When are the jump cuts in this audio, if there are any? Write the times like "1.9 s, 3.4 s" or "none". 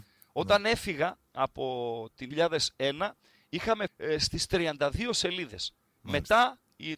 1.3 s, 2.3 s, 3.9 s